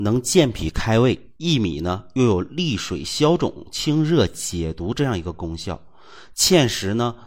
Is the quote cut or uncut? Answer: cut